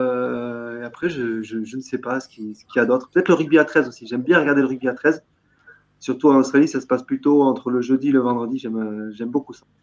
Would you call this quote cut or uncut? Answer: uncut